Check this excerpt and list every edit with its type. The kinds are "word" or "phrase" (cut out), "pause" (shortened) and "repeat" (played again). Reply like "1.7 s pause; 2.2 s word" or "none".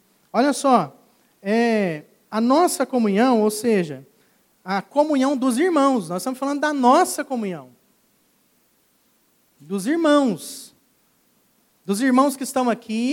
none